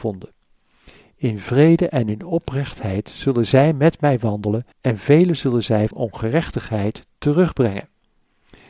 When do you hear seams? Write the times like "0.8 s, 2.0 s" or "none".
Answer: 4.7 s, 5.9 s